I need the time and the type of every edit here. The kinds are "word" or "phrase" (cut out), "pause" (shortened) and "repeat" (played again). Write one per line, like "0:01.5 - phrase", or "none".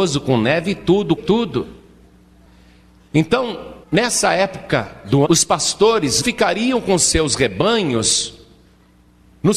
0:01.2 - phrase
0:03.8 - pause
0:05.2 - word
0:06.2 - word